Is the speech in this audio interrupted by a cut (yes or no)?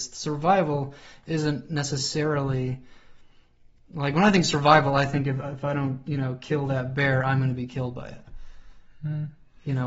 no